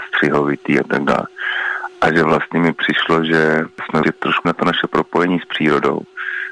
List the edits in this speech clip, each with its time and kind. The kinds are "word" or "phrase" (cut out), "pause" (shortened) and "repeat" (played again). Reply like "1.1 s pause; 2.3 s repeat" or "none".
4.0 s word; 4.4 s word